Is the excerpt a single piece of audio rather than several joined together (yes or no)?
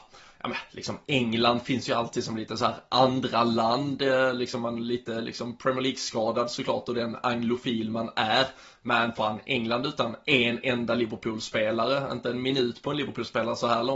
yes